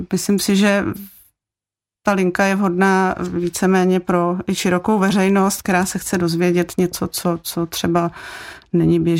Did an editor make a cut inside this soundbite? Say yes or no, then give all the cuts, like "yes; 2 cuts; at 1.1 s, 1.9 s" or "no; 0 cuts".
no; 0 cuts